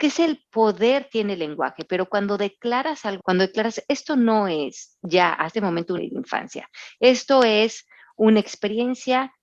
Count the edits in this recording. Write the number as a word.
three